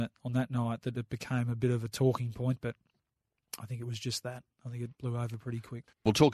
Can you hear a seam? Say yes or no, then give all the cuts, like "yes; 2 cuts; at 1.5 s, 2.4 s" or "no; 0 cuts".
yes; 1 cut; at 4.9 s